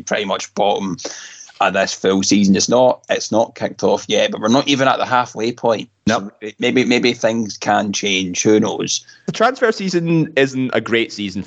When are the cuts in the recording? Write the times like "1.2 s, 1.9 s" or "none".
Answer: 6.0 s